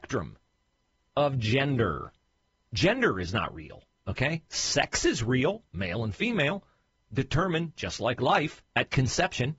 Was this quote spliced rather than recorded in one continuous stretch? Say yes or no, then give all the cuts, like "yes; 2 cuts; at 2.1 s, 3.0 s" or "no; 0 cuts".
no; 0 cuts